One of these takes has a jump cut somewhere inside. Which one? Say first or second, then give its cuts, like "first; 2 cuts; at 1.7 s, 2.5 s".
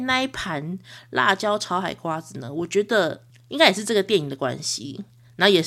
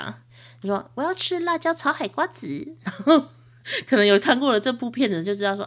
first; 1 cut; at 3.3 s